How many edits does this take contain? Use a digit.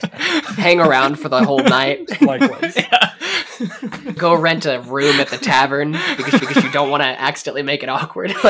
2